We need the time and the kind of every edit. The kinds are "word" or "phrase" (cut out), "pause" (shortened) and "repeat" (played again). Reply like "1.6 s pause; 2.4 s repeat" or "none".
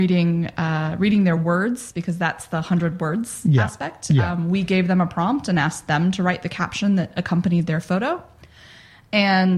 none